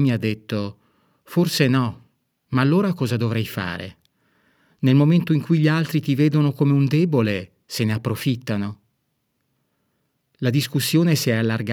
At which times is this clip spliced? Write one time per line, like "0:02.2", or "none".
none